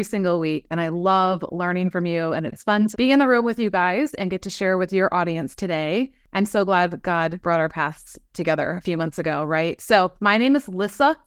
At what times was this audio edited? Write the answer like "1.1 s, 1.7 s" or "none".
2.9 s, 10.2 s

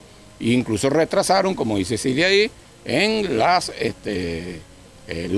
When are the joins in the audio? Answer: none

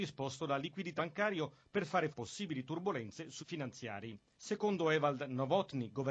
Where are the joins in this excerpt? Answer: 1.0 s, 2.1 s, 3.4 s

